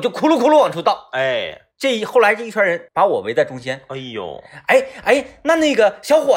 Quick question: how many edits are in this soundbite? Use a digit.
2